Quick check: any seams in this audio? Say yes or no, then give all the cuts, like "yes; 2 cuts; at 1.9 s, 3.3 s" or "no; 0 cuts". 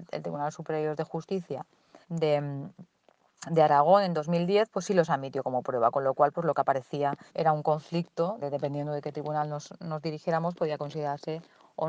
yes; 3 cuts; at 2.0 s, 7.3 s, 8.4 s